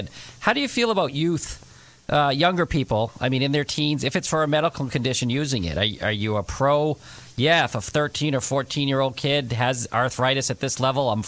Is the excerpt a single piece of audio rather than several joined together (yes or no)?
yes